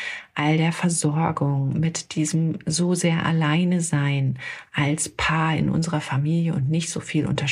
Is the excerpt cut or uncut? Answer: uncut